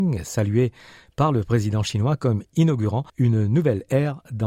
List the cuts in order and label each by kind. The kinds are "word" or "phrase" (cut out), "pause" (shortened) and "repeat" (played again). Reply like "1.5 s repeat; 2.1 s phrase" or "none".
3.1 s pause